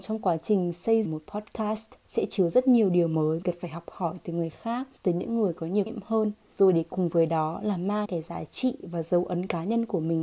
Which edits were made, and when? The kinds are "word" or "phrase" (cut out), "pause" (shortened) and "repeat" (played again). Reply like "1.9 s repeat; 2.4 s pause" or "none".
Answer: 1.0 s phrase; 3.4 s word; 5.0 s pause; 5.9 s word; 8.1 s word